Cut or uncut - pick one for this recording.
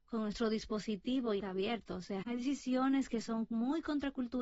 cut